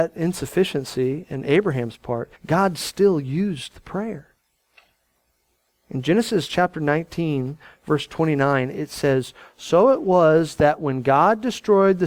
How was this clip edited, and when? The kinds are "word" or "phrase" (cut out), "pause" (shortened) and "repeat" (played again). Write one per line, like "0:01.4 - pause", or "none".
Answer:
0:02.3 - pause